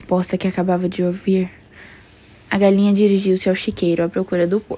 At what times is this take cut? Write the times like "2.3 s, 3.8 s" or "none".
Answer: none